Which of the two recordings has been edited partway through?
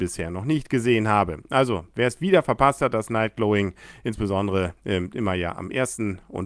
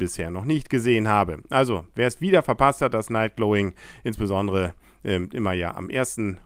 first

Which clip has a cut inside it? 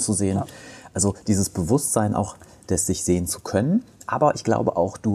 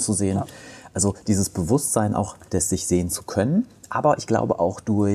second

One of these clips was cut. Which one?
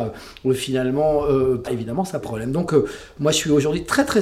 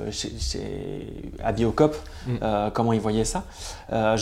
first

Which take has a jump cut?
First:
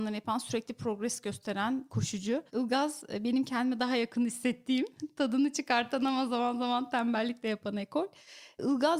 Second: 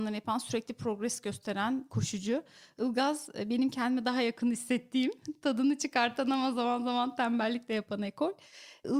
first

